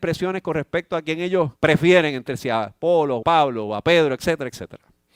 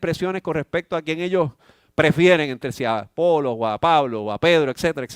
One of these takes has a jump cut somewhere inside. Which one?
first; 2 cuts; at 1.6 s, 3.2 s

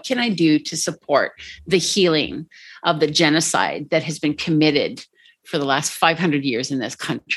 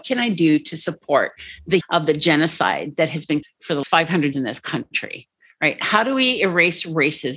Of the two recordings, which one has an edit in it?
second; 4 cuts; at 1.8 s, 3.4 s, 3.8 s, 4.3 s

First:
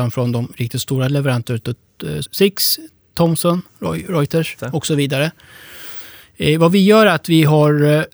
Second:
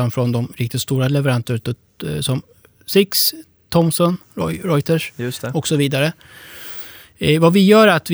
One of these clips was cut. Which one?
first; 2 cuts; at 2.2 s, 4.6 s

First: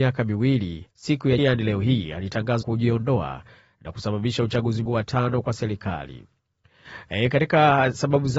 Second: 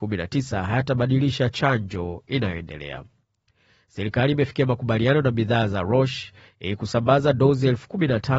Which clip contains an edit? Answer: first; 4 cuts; at 0.9 s, 1.4 s, 2.6 s, 4.9 s

